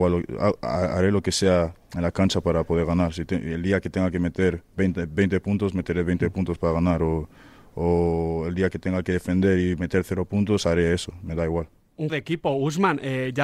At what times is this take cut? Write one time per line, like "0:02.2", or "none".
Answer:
0:12.1